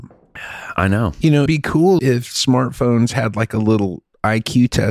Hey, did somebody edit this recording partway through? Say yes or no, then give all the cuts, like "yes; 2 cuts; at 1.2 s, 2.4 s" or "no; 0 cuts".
yes; 2 cuts; at 1.5 s, 2.0 s